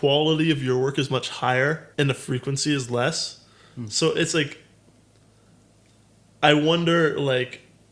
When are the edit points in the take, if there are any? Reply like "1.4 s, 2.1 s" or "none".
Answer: 1.9 s

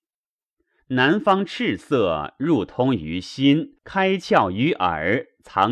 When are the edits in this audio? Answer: 3.8 s

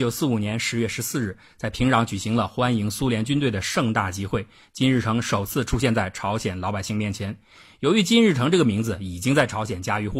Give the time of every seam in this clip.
none

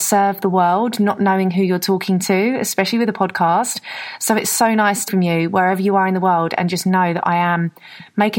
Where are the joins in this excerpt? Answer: 5.1 s

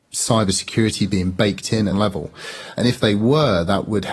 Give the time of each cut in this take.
1.9 s

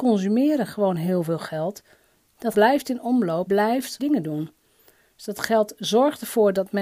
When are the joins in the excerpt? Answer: 2.5 s, 3.5 s, 4.0 s

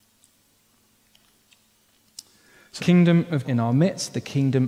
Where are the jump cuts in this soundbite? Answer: 2.8 s, 3.4 s

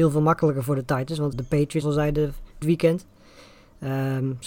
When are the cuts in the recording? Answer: 1.3 s, 1.8 s, 2.6 s

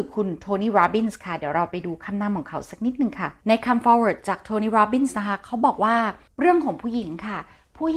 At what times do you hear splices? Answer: none

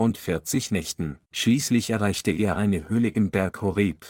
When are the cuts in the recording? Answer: 1.2 s

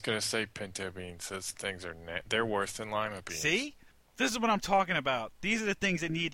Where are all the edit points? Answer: 3.9 s

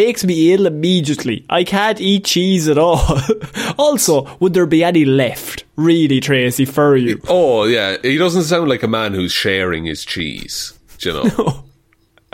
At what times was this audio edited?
none

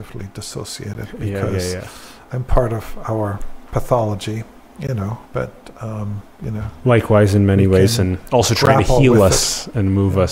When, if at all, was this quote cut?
5.3 s

